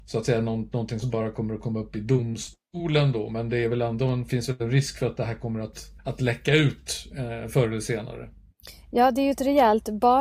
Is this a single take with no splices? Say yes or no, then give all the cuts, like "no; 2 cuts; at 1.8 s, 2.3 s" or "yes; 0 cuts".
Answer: no; 1 cut; at 6.0 s